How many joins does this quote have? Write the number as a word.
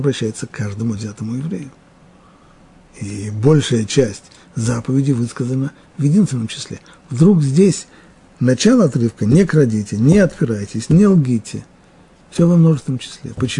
one